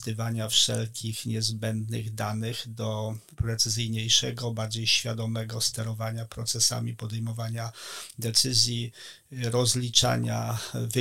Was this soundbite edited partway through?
no; 0 cuts

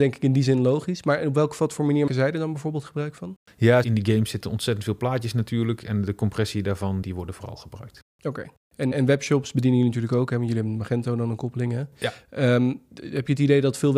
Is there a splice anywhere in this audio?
yes; 3 cuts; at 2.1 s, 7.0 s, 8.9 s

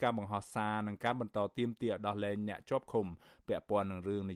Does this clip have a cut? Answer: no; 0 cuts

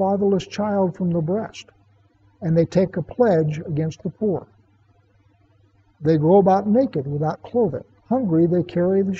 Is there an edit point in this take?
no; 0 cuts

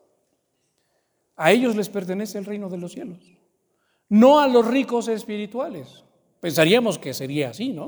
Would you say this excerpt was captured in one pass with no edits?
yes; 0 cuts

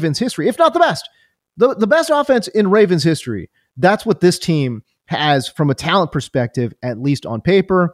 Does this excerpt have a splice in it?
no; 0 cuts

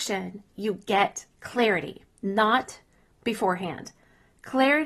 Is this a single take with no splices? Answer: no; 1 cut; at 2.1 s

